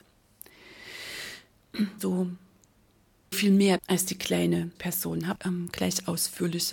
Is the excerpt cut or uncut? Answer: cut